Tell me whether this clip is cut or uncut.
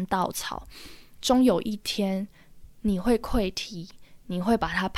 cut